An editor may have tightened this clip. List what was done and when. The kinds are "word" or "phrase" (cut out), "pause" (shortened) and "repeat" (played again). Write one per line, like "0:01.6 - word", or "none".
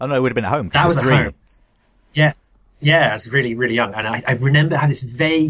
none